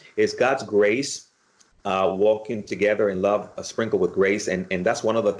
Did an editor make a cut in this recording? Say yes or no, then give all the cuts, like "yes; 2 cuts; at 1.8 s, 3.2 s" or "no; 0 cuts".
no; 0 cuts